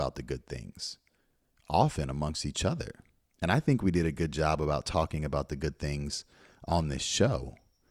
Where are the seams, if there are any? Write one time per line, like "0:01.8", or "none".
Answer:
none